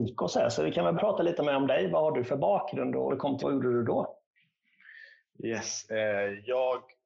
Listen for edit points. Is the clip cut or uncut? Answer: cut